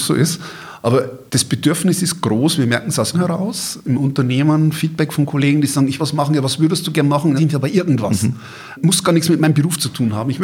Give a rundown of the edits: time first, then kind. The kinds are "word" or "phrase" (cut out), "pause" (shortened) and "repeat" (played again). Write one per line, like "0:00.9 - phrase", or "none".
0:01.3 - pause
0:03.1 - word
0:06.0 - phrase
0:07.4 - phrase

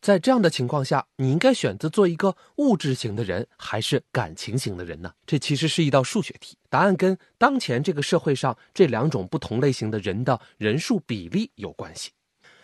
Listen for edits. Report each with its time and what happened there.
0:05.2 - pause
0:06.6 - pause

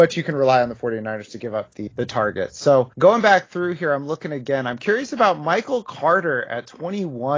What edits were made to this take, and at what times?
0:01.9 - word
0:02.9 - pause

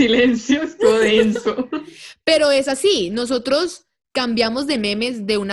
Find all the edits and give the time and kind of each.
none

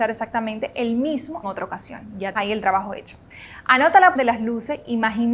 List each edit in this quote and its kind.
0:01.4 - word
0:02.3 - word
0:04.1 - word

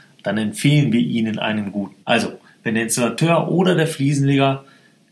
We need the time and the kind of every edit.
0:02.0 - pause

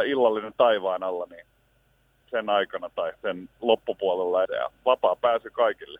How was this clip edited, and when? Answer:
0:02.2 - word
0:03.2 - pause
0:04.4 - word

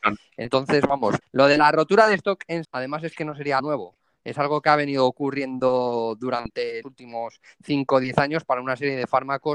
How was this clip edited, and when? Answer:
0:01.2 - word
0:02.6 - word
0:03.6 - word
0:06.8 - word

